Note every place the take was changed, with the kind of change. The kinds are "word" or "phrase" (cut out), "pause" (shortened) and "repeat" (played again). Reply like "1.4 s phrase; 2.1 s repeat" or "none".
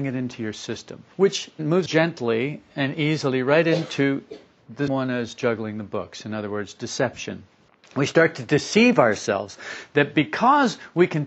1.1 s pause; 1.9 s word; 4.9 s word; 7.7 s pause